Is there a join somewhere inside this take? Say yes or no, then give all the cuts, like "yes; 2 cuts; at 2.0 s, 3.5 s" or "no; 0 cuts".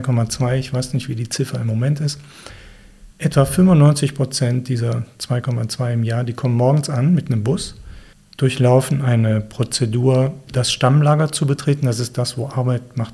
yes; 3 cuts; at 3.1 s, 8.1 s, 10.5 s